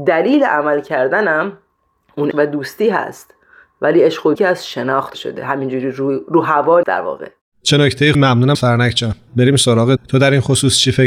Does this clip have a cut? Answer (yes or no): yes